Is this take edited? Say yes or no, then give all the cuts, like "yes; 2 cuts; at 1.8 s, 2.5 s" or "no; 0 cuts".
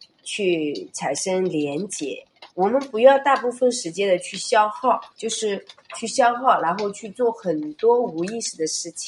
yes; 2 cuts; at 2.5 s, 5.1 s